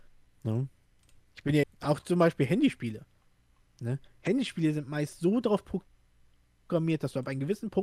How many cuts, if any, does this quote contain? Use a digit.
1